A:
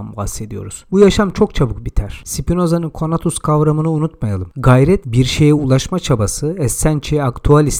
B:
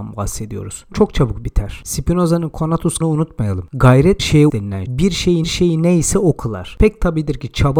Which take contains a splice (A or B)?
B